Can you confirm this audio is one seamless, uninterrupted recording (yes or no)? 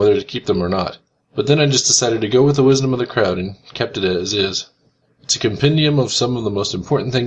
no